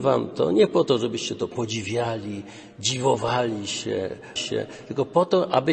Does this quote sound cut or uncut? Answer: cut